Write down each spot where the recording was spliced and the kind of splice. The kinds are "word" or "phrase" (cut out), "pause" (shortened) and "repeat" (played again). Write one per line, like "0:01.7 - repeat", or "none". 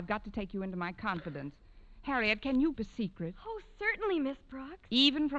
0:02.7 - word